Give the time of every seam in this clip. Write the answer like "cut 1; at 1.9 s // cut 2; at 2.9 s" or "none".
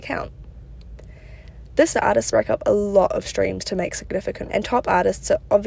cut 1; at 1.9 s // cut 2; at 2.3 s // cut 3; at 4.5 s